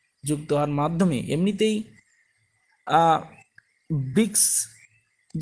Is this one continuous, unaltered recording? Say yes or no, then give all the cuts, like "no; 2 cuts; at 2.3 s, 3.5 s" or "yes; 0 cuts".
yes; 0 cuts